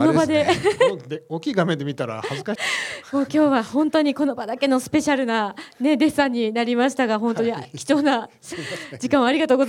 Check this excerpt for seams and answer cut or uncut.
cut